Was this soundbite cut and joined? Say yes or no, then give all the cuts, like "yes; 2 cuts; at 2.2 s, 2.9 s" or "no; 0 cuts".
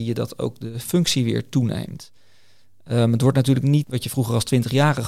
no; 0 cuts